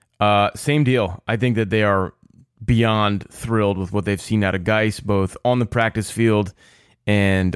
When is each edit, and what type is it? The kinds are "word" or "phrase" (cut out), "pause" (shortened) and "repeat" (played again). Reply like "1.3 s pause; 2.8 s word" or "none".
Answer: none